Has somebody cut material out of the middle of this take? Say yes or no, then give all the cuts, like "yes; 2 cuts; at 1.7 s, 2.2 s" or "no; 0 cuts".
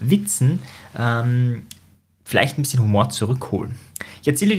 no; 0 cuts